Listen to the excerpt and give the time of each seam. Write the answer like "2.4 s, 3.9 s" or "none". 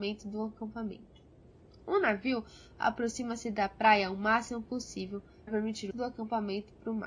5.5 s, 5.9 s